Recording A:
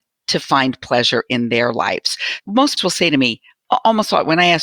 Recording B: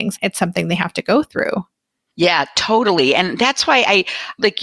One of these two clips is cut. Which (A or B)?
A